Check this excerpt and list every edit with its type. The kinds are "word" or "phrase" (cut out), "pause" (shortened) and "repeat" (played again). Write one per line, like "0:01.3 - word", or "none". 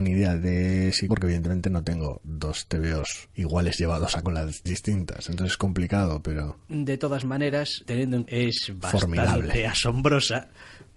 0:01.1 - word
0:03.3 - pause
0:04.2 - word
0:04.7 - word
0:07.9 - word
0:08.3 - phrase